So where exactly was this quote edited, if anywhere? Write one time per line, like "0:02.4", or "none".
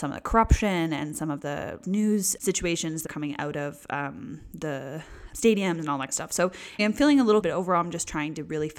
0:01.4
0:01.8
0:02.4
0:03.1
0:05.3
0:06.1
0:06.8
0:07.4